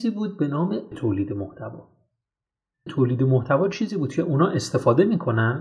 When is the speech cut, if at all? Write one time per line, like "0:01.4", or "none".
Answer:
0:00.9
0:02.9